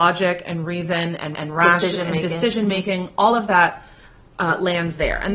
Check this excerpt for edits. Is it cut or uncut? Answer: cut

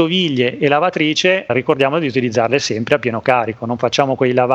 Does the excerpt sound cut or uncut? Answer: uncut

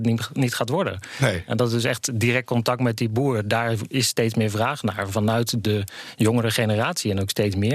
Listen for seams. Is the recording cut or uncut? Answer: uncut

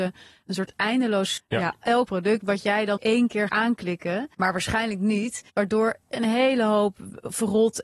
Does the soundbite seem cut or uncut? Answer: cut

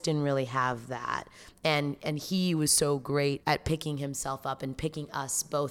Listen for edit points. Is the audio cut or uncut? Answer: cut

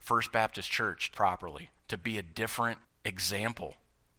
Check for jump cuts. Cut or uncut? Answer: cut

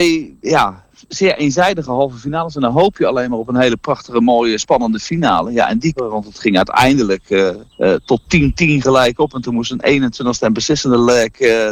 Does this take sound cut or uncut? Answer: cut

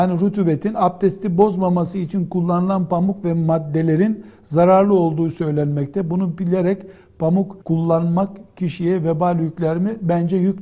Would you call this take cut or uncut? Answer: cut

